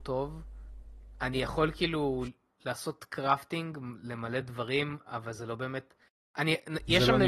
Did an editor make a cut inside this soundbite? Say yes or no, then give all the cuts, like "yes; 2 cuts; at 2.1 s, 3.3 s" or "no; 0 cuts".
no; 0 cuts